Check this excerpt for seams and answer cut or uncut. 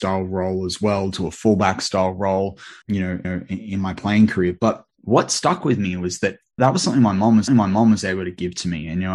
cut